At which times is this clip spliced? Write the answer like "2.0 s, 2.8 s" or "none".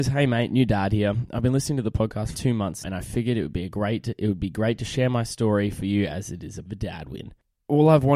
2.3 s, 2.8 s, 6.6 s